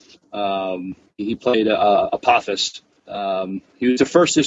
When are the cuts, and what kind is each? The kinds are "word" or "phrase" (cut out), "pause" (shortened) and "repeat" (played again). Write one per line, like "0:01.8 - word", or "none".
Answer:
0:01.0 - pause